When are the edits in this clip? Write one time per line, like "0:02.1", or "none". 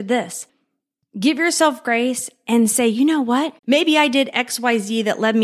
0:03.6